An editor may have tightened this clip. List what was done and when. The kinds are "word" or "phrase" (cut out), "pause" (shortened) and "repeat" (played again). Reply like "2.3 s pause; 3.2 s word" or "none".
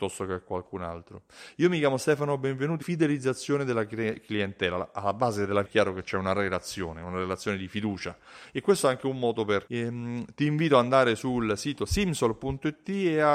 2.8 s phrase; 5.6 s word; 9.7 s word